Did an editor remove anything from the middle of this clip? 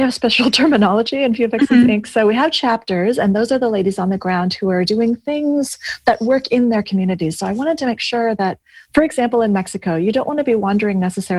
yes; 1 cut; at 8.8 s

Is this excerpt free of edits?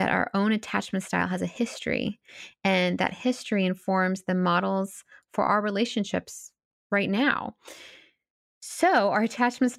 yes; 0 cuts

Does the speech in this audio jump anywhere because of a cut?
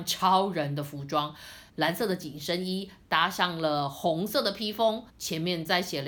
yes; 2 cuts; at 1.7 s, 5.1 s

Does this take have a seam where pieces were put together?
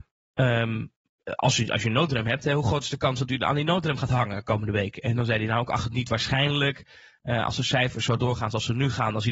no; 0 cuts

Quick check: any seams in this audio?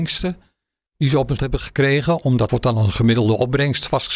yes; 2 cuts; at 1.4 s, 2.5 s

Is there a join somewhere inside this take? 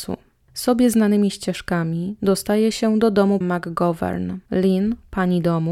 yes; 2 cuts; at 3.4 s, 4.5 s

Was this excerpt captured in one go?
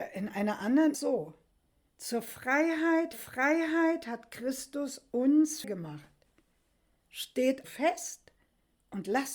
no; 4 cuts; at 0.9 s, 3.1 s, 5.6 s, 7.6 s

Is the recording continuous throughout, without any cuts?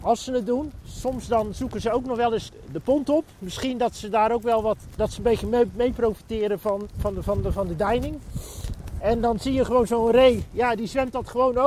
no; 1 cut; at 5.0 s

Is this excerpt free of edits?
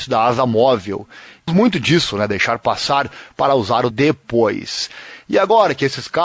no; 2 cuts; at 1.5 s, 3.9 s

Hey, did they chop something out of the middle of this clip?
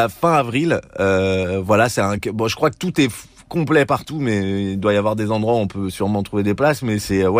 no; 0 cuts

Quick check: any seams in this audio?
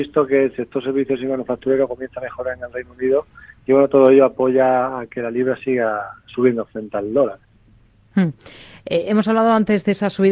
no; 0 cuts

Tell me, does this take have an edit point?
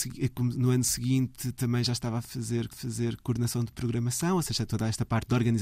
yes; 1 cut; at 2.7 s

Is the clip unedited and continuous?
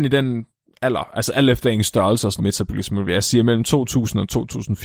no; 1 cut; at 2.4 s

